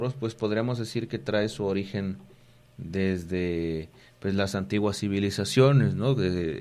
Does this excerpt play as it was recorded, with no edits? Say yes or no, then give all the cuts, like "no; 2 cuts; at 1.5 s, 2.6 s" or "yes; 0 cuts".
yes; 0 cuts